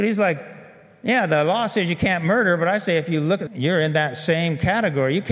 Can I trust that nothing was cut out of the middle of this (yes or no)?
no